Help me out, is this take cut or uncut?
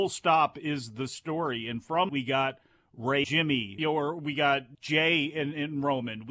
cut